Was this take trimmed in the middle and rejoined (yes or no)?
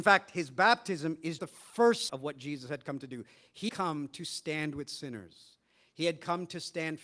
yes